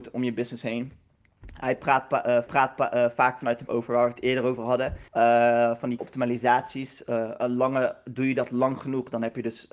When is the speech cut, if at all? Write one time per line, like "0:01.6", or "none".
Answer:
0:02.5
0:03.7
0:05.1
0:06.0